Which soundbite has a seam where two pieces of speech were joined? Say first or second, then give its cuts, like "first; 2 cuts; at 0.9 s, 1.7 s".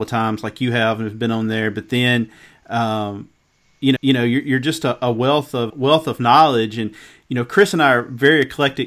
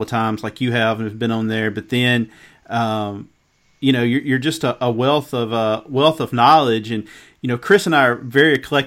first; 2 cuts; at 4.0 s, 5.7 s